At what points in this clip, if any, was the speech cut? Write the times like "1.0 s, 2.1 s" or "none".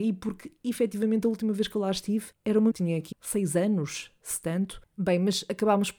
2.7 s, 3.1 s